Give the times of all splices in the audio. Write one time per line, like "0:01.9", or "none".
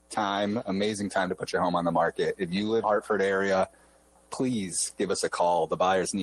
0:02.8